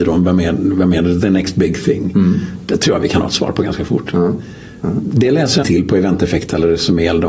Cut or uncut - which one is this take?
cut